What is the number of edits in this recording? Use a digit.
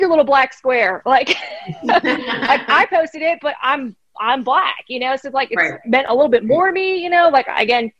0